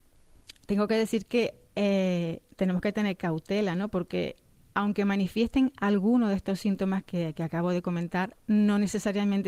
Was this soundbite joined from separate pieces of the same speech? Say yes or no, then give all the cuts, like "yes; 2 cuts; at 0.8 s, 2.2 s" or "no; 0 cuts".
no; 0 cuts